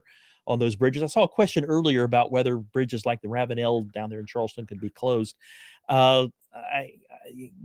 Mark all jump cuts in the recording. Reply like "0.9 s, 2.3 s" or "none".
none